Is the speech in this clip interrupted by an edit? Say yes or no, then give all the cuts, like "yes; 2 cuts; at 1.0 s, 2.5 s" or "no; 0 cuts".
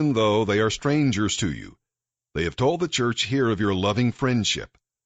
no; 0 cuts